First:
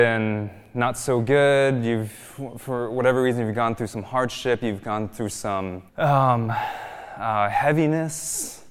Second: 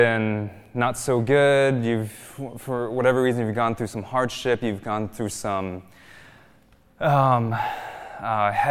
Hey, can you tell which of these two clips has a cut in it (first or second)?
first